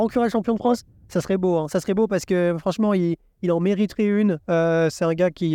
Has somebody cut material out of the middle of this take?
no; 0 cuts

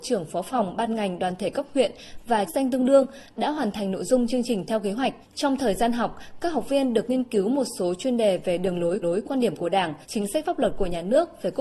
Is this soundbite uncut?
no; 4 cuts; at 2.5 s, 5.2 s, 9.0 s, 10.0 s

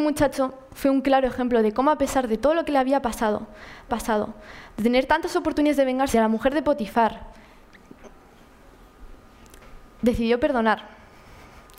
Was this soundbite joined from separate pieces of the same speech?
yes; 2 cuts; at 3.9 s, 6.1 s

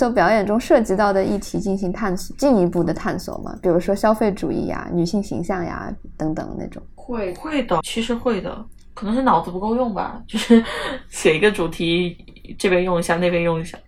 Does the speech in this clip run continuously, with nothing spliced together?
no; 1 cut; at 7.8 s

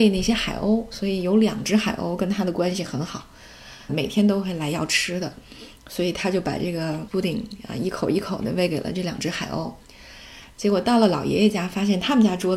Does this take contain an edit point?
yes; 2 cuts; at 3.9 s, 7.1 s

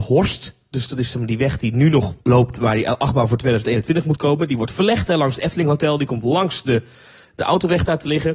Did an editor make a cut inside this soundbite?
yes; 1 cut; at 2.2 s

